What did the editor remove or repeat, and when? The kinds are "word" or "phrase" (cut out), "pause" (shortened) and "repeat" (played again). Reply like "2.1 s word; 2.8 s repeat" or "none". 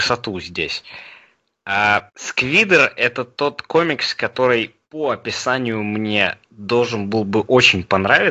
4.8 s pause